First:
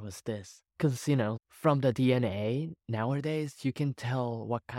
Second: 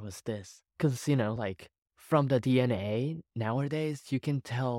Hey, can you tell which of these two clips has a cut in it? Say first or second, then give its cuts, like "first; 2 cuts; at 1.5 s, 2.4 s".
first; 1 cut; at 1.4 s